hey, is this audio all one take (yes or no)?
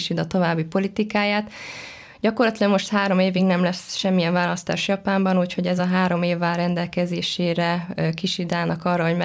yes